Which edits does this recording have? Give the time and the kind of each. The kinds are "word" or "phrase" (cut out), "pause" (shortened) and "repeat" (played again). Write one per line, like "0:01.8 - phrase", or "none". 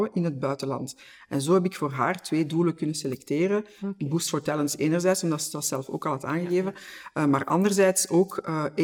none